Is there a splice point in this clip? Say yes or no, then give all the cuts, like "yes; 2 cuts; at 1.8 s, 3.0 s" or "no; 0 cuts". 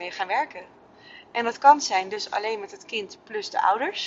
no; 0 cuts